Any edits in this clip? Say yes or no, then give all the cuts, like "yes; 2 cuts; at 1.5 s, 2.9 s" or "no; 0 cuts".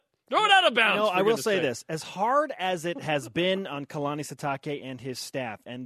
no; 0 cuts